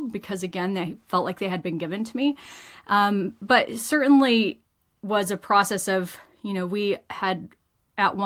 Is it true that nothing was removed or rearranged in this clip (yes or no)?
yes